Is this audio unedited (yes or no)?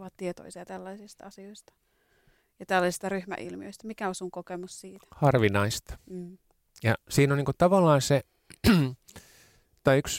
yes